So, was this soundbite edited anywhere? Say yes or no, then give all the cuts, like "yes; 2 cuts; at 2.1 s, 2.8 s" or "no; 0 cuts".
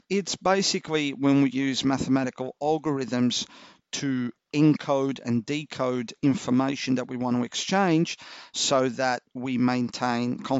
no; 0 cuts